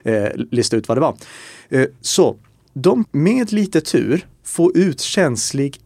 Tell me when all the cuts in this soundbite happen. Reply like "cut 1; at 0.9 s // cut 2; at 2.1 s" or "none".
cut 1; at 2.7 s // cut 2; at 3.0 s // cut 3; at 4.3 s